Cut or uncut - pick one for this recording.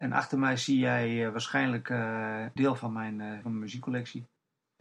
cut